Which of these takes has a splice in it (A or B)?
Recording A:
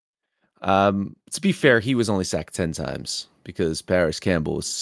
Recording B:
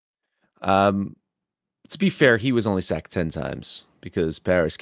A